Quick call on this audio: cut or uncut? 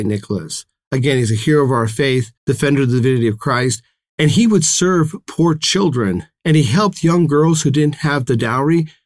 cut